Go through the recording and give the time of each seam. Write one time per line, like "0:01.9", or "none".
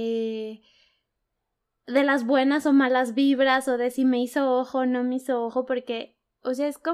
none